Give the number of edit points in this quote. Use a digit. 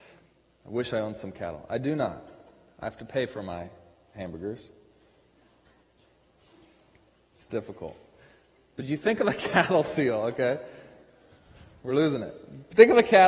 0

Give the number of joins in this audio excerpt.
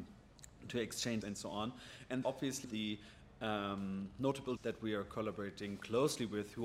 4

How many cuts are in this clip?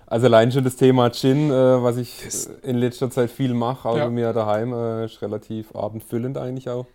0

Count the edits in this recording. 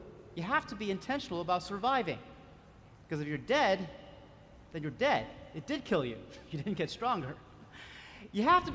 1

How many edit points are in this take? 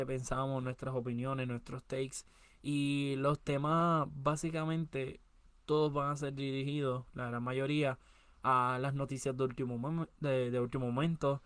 0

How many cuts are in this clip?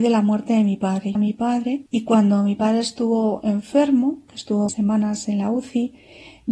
3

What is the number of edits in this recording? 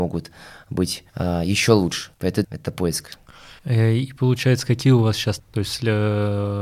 5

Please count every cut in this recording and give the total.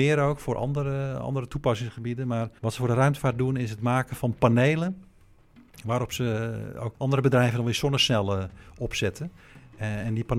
2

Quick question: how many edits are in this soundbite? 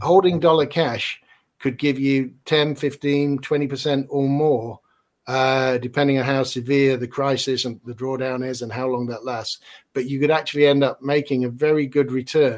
0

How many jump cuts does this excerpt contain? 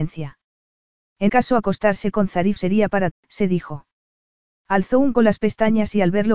4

